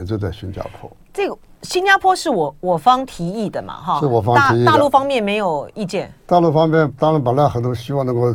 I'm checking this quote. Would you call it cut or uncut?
uncut